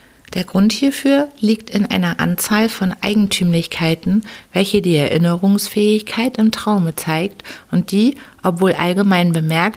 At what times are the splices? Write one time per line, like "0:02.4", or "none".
none